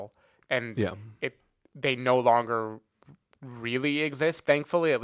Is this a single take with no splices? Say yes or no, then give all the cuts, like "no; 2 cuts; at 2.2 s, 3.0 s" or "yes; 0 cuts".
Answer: yes; 0 cuts